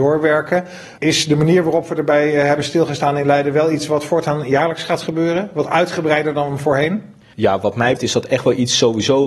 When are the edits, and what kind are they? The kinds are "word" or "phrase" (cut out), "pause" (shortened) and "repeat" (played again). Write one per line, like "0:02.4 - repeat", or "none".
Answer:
0:08.0 - word